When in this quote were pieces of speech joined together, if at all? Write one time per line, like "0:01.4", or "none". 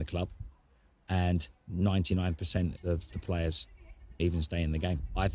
0:02.7
0:03.1
0:04.2